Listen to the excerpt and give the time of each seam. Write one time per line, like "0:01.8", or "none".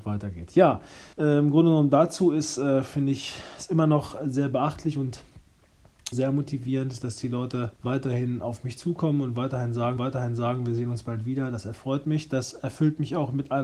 0:01.1
0:06.1
0:07.8
0:10.0